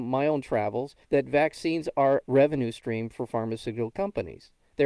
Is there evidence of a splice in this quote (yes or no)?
yes